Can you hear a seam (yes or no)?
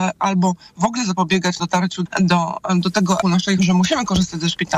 yes